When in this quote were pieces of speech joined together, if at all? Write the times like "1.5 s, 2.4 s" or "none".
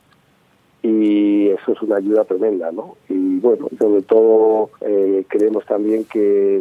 4.8 s